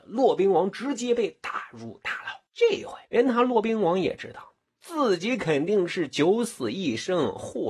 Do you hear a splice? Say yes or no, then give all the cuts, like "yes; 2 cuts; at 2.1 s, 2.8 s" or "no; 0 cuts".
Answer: yes; 2 cuts; at 2.5 s, 3.0 s